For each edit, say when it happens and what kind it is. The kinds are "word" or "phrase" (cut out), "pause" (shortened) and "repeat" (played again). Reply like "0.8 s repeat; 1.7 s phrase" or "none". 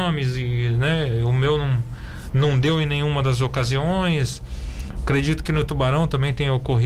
none